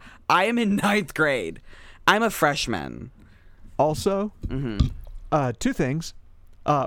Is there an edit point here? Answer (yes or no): no